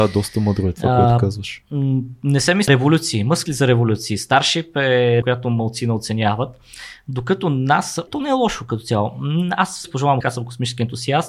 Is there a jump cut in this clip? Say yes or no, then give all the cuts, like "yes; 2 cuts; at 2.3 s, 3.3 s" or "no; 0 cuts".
yes; 6 cuts; at 2.7 s, 3.5 s, 5.2 s, 8.1 s, 9.8 s, 10.2 s